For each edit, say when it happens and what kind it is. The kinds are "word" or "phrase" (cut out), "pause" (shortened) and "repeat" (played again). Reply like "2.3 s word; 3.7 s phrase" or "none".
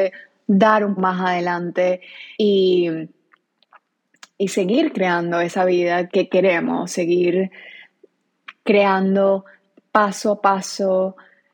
1.0 s word; 2.3 s pause; 6.1 s word